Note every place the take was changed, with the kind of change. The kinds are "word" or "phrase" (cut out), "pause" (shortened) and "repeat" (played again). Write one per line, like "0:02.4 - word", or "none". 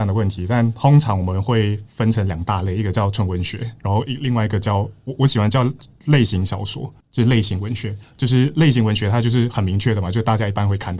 0:07.0 - pause